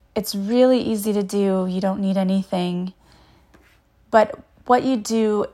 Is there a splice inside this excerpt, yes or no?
no